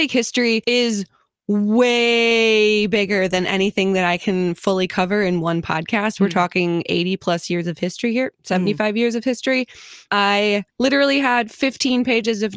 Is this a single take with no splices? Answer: yes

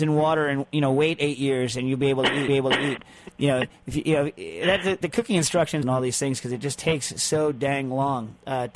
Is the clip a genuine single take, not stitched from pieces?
no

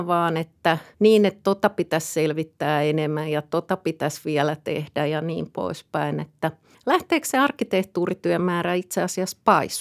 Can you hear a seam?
yes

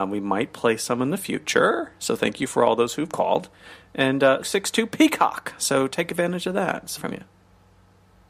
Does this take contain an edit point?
yes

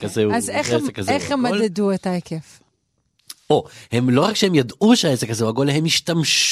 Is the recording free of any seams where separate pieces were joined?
yes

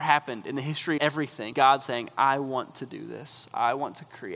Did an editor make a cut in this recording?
yes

